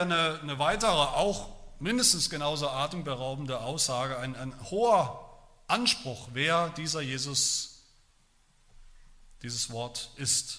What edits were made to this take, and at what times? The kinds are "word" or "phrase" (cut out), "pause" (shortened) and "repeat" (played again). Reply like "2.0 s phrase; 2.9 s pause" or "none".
none